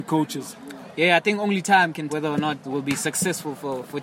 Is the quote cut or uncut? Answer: cut